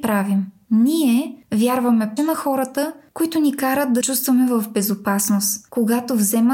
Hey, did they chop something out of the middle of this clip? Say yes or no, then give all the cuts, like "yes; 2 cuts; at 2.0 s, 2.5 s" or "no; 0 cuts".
yes; 2 cuts; at 2.2 s, 4.0 s